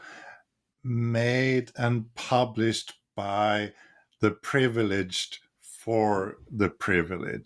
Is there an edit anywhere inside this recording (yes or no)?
no